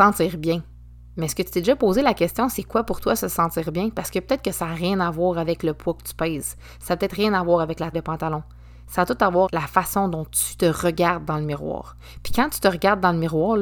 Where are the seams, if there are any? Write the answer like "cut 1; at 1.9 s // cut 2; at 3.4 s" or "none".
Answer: cut 1; at 7.9 s // cut 2; at 9.5 s